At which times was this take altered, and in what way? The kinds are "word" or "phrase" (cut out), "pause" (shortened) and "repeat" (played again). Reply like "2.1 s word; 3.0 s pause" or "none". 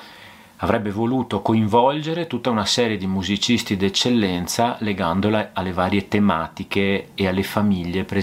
none